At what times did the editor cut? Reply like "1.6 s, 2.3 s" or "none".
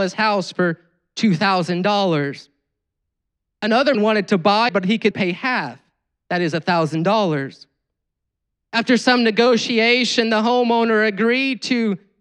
3.9 s, 4.7 s, 5.1 s

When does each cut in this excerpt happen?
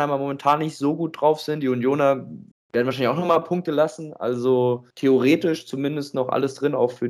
2.5 s, 4.9 s

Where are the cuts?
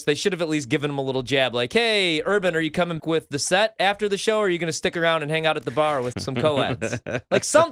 3.0 s, 6.1 s

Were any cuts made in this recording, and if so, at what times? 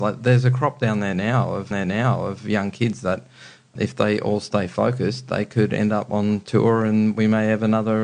1.7 s, 3.8 s

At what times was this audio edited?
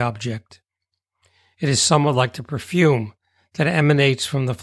none

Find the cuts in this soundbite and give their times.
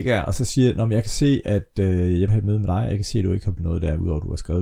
2.3 s, 3.6 s

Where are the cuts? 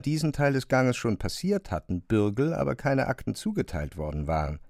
none

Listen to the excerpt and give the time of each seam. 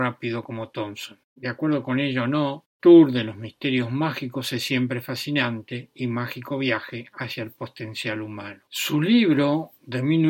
1.2 s, 8.6 s

